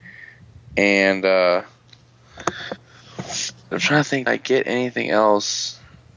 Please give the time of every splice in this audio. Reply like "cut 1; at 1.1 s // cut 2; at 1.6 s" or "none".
cut 1; at 3.7 s // cut 2; at 4.3 s